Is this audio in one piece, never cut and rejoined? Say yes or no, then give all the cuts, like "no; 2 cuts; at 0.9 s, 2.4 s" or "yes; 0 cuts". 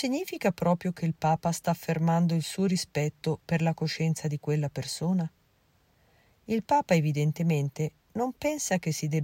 yes; 0 cuts